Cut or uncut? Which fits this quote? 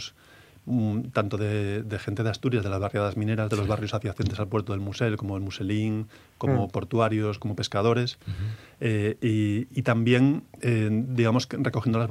uncut